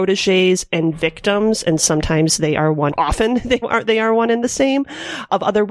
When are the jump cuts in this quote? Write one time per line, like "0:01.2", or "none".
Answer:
0:02.9
0:03.6